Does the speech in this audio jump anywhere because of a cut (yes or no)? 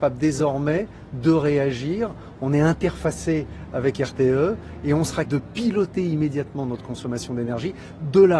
yes